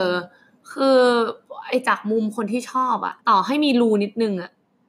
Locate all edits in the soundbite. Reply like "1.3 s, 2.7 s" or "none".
3.2 s